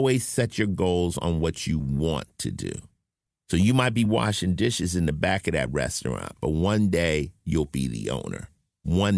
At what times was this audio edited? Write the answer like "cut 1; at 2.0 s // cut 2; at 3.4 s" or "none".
none

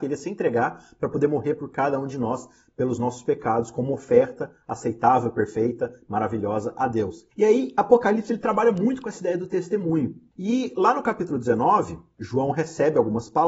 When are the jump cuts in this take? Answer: none

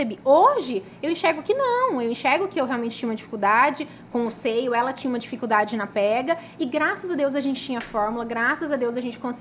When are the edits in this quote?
none

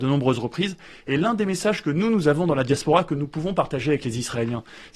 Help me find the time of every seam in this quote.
none

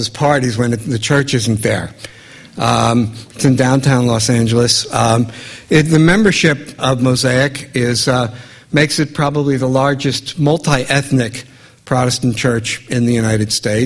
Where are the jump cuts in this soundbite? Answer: cut 1; at 6.8 s

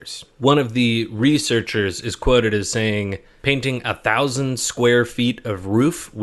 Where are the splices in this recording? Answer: none

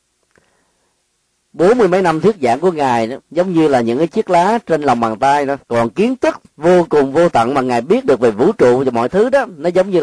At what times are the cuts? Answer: cut 1; at 3.2 s // cut 2; at 5.6 s // cut 3; at 6.5 s

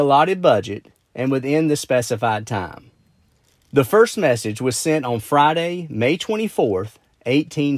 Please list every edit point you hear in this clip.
cut 1; at 3.3 s

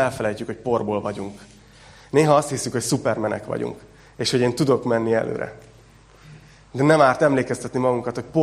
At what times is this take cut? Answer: none

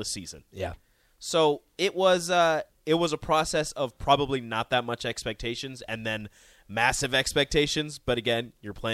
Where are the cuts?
none

